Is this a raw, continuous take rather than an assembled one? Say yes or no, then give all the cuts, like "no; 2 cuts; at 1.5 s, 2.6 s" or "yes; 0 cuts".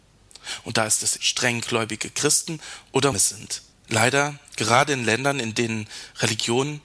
no; 3 cuts; at 1.2 s, 3.1 s, 3.7 s